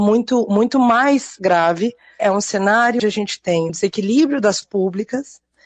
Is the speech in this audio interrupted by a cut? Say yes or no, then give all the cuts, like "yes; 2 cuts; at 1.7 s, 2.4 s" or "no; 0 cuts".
yes; 4 cuts; at 2.2 s, 3.0 s, 3.7 s, 4.6 s